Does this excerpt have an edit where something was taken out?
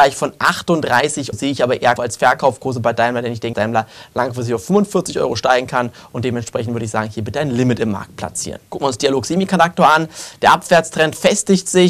yes; 4 cuts; at 1.3 s, 2.0 s, 3.5 s, 8.7 s

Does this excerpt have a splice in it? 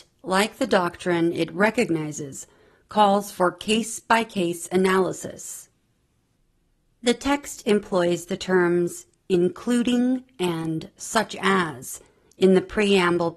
no; 0 cuts

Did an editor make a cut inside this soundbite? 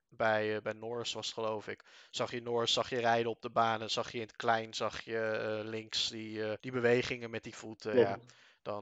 yes; 1 cut; at 6.6 s

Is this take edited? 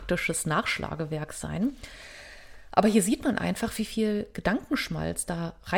no; 0 cuts

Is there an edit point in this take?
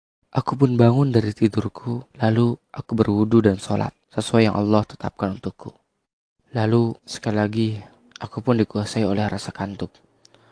yes; 4 cuts; at 2.1 s, 4.0 s, 7.0 s, 8.1 s

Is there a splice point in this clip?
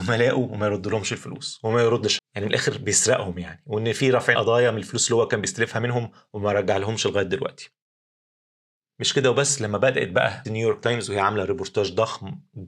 yes; 3 cuts; at 2.2 s, 4.3 s, 10.4 s

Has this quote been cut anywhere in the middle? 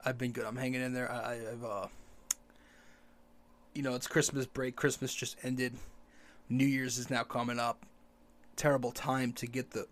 no; 0 cuts

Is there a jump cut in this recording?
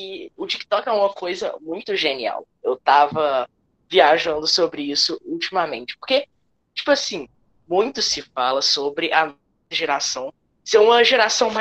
no; 0 cuts

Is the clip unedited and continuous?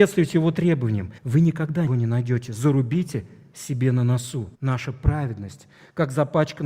no; 3 cuts; at 1.2 s, 1.9 s, 4.5 s

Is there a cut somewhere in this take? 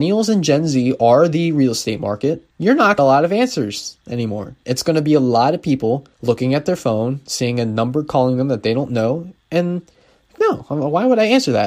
yes; 5 cuts; at 2.5 s, 3.0 s, 4.6 s, 6.1 s, 10.4 s

